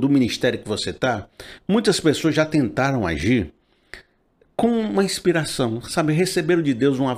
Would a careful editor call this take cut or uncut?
uncut